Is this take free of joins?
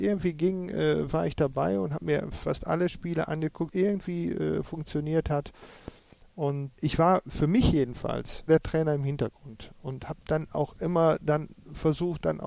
no; 3 cuts; at 3.7 s, 6.7 s, 8.5 s

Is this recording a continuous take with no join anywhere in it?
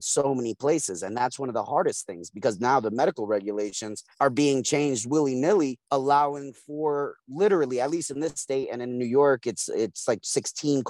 no; 2 cuts; at 4.1 s, 5.8 s

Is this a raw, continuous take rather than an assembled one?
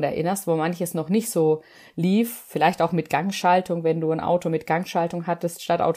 yes; 0 cuts

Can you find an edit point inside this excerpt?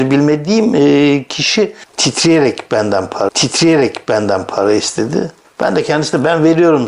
yes; 1 cut; at 3.3 s

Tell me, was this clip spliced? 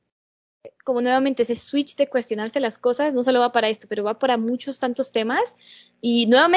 no; 0 cuts

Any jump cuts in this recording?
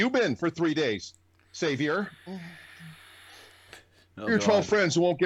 yes; 1 cut; at 4.3 s

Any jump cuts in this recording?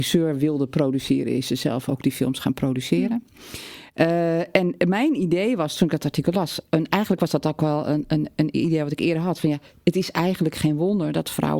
no; 0 cuts

